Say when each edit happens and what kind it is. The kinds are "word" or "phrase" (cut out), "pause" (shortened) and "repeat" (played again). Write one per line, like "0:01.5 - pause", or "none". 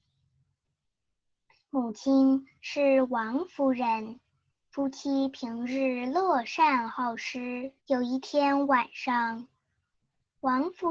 0:04.5 - pause
0:07.8 - pause